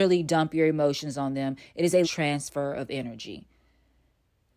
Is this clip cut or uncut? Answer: cut